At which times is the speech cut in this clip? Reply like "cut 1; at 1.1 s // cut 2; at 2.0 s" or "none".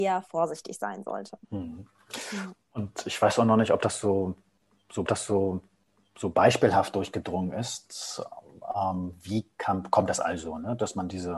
cut 1; at 1.4 s // cut 2; at 5.1 s